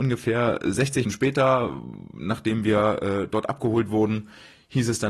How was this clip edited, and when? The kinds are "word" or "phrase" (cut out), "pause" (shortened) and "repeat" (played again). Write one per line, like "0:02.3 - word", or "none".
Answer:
0:01.0 - word